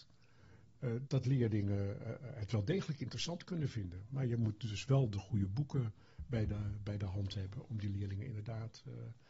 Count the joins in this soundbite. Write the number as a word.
one